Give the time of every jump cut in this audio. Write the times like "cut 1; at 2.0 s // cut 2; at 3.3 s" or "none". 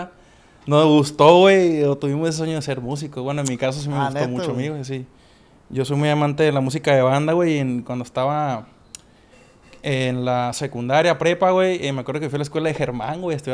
none